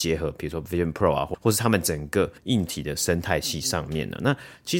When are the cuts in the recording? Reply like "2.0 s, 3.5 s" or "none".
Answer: 2.4 s